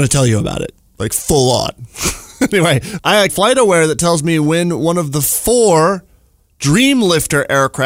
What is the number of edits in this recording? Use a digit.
2